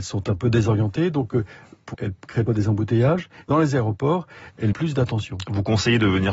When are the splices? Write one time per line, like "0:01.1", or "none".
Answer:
0:01.9
0:02.5
0:03.5
0:04.7

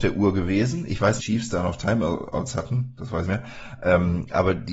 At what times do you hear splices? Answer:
0:01.2
0:03.2

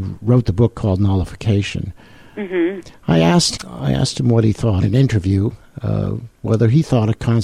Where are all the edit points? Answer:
0:03.6
0:04.8

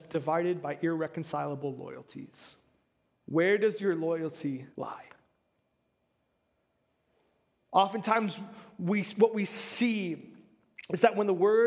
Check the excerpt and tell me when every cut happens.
0:03.1
0:04.7

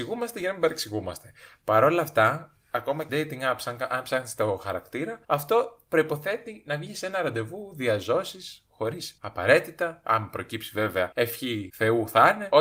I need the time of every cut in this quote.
0:03.1
0:05.2
0:09.2

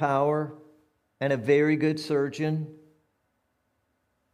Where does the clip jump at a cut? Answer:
none

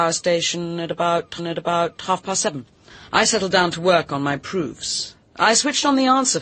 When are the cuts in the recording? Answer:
0:01.4
0:02.9

